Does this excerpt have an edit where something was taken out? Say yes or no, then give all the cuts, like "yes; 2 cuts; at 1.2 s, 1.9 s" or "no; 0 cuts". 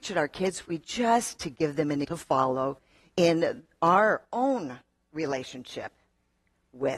yes; 2 cuts; at 1.4 s, 2.0 s